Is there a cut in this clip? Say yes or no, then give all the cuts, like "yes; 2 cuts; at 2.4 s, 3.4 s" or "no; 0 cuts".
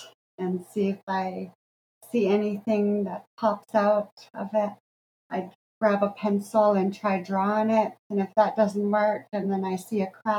no; 0 cuts